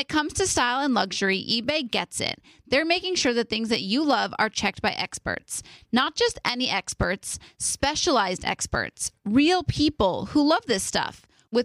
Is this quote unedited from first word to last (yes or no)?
yes